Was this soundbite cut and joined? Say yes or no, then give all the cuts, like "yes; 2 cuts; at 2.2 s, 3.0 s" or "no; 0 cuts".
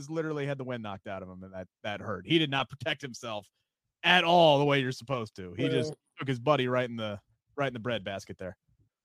no; 0 cuts